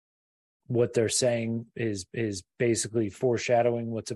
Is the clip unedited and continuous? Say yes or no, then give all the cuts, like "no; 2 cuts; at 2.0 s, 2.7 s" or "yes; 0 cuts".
no; 1 cut; at 2.1 s